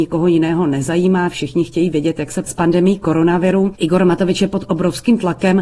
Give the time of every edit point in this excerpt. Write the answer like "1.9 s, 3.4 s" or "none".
2.4 s